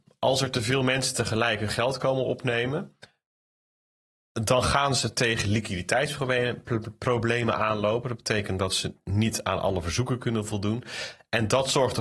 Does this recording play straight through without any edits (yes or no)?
yes